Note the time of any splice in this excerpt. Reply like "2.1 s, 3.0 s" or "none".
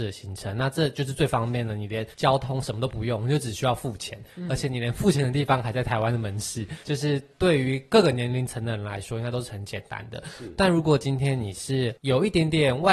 2.1 s, 6.8 s